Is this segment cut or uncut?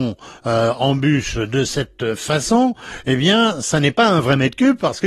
uncut